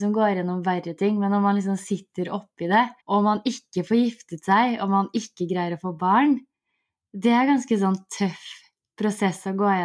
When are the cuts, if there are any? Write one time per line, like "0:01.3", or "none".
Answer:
0:03.0

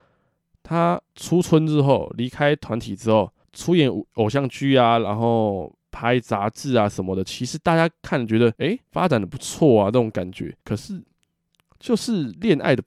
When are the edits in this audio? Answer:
0:01.1
0:03.4
0:05.8
0:08.6
0:08.9
0:10.6

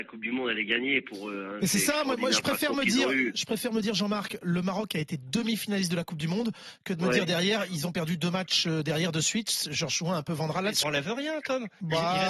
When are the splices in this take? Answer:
0:10.8

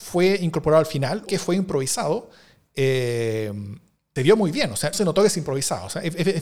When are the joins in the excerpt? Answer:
0:01.3
0:04.2
0:04.9

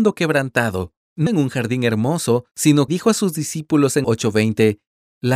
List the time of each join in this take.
0:01.3
0:02.9
0:04.0

